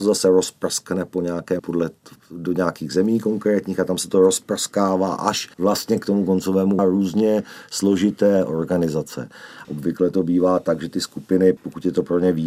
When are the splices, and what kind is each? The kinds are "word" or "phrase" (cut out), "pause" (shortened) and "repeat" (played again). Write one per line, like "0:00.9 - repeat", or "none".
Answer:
0:01.6 - word
0:05.5 - pause
0:06.8 - phrase